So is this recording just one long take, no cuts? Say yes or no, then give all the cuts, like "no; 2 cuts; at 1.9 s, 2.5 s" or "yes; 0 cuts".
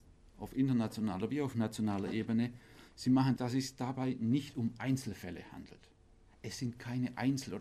no; 1 cut; at 3.4 s